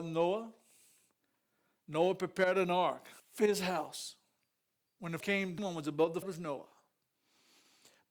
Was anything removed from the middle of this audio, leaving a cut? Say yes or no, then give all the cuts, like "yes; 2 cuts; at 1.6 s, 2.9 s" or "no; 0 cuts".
yes; 4 cuts; at 3.2 s, 5.2 s, 5.6 s, 6.2 s